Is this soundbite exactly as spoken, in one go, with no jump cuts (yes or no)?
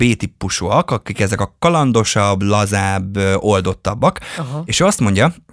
yes